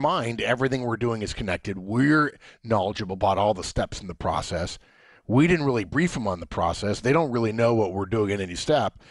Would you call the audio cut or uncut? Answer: uncut